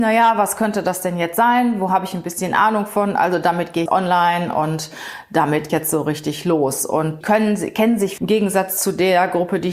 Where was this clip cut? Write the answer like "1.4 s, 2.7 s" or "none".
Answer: 3.9 s, 5.7 s, 7.2 s, 8.2 s